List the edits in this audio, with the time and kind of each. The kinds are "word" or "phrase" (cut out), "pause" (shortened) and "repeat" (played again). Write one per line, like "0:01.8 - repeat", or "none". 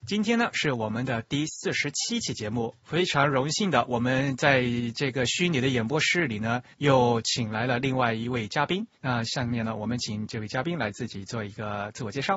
0:02.8 - pause
0:06.7 - pause
0:08.9 - pause